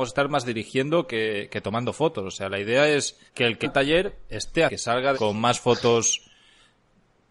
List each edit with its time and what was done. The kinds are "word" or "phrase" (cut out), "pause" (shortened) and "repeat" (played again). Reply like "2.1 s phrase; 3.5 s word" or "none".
3.3 s pause; 3.6 s word; 4.7 s phrase; 5.1 s phrase